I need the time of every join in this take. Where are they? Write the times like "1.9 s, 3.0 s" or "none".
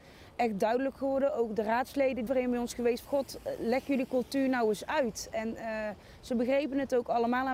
2.3 s, 3.0 s